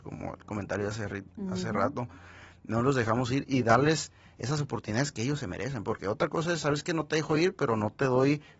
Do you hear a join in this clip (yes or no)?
no